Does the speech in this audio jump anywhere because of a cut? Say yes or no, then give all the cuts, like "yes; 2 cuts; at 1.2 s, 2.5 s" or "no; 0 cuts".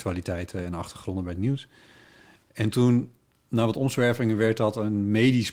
no; 0 cuts